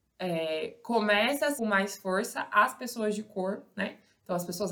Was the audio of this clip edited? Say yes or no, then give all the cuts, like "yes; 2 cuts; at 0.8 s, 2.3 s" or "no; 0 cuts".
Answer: yes; 1 cut; at 1.6 s